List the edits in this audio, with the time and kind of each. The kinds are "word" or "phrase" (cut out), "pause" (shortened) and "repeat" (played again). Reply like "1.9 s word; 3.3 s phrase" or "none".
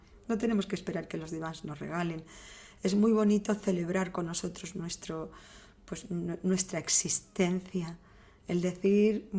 none

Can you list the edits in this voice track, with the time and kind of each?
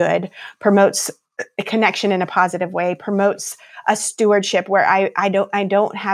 none

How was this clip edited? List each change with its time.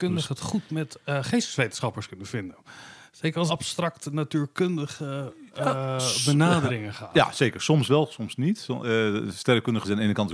3.5 s phrase

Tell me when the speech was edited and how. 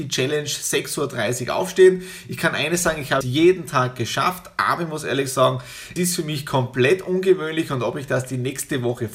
3.2 s word; 6.0 s word

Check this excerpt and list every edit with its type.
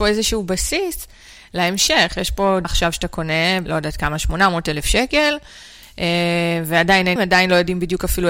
2.6 s word; 3.7 s word; 7.2 s word

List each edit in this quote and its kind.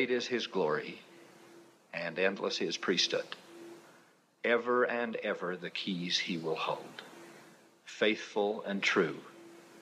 none

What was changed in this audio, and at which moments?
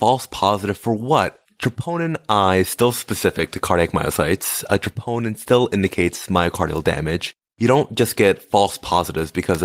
none

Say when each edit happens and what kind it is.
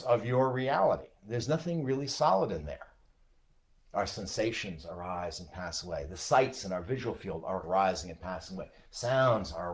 7.6 s word

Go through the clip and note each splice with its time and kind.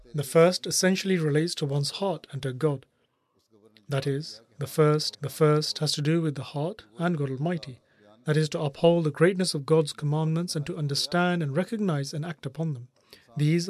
5.1 s repeat

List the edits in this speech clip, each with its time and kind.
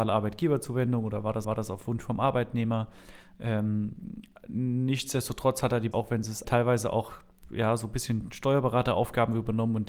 1.4 s repeat; 5.9 s word; 6.4 s phrase

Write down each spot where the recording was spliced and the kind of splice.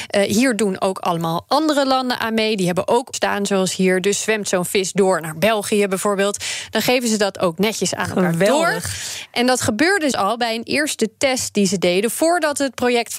3.1 s word; 10.1 s word

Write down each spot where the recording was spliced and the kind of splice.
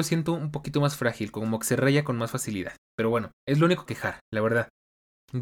3.9 s phrase

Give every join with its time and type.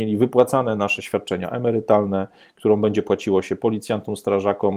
none

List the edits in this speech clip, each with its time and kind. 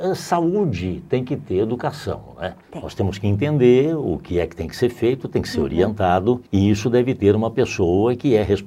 2.6 s pause; 6.5 s pause

